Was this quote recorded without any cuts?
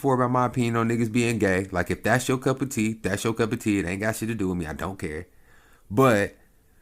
yes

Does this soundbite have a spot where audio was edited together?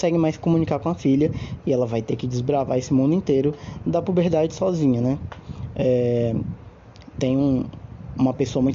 no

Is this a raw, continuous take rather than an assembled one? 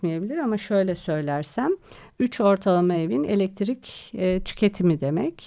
yes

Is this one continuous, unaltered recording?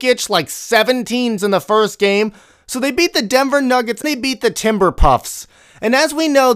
no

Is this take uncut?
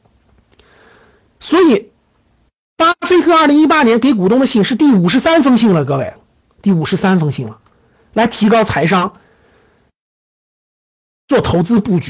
yes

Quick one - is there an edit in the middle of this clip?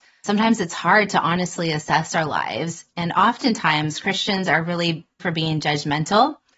yes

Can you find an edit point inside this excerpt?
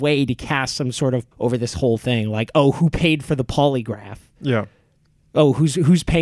yes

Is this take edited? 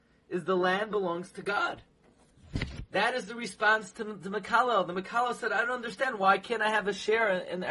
no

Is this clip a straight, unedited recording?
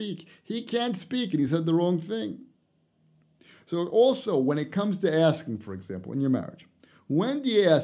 yes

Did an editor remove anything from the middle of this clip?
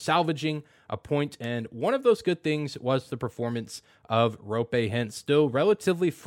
no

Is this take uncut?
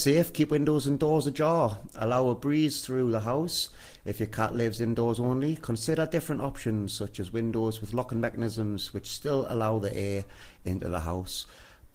yes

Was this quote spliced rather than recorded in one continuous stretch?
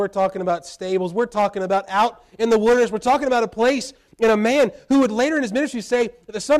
no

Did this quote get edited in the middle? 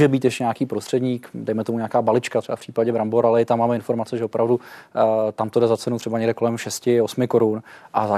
no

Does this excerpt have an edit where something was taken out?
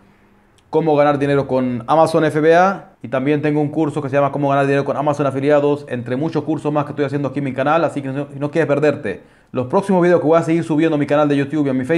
yes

